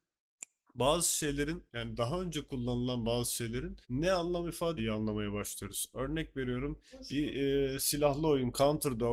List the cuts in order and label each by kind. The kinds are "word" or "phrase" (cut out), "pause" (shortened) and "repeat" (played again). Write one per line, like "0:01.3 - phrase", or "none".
0:01.7 - pause
0:03.8 - pause
0:04.8 - phrase